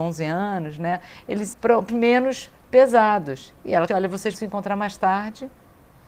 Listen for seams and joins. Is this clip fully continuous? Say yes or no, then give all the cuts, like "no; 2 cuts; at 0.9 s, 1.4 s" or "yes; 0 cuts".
no; 4 cuts; at 1.5 s, 1.9 s, 3.9 s, 4.3 s